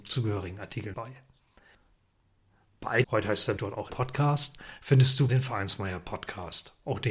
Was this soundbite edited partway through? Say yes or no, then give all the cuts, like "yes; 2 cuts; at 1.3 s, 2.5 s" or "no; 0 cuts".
yes; 5 cuts; at 0.9 s, 3.0 s, 3.6 s, 3.9 s, 5.3 s